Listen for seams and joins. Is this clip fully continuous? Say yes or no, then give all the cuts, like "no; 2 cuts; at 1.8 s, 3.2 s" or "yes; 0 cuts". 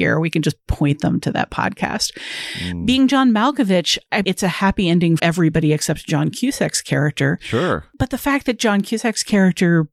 no; 2 cuts; at 4.2 s, 5.2 s